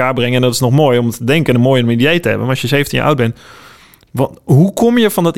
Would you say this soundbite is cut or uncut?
uncut